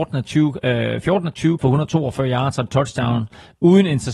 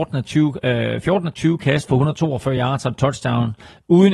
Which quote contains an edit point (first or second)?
first